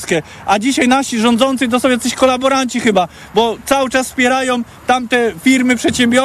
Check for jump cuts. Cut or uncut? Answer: uncut